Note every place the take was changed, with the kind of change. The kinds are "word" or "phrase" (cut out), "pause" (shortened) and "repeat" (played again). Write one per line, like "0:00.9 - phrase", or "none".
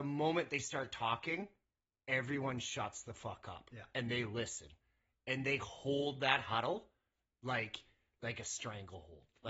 none